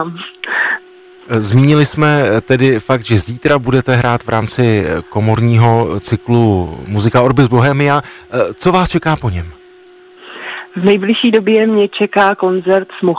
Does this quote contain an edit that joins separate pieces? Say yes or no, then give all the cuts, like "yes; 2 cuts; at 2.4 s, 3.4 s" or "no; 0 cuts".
no; 0 cuts